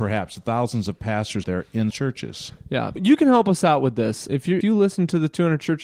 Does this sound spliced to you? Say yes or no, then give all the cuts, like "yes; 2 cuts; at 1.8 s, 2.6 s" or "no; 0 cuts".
yes; 5 cuts; at 1.4 s, 1.9 s, 3.0 s, 4.3 s, 4.6 s